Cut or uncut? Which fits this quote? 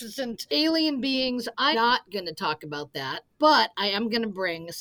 cut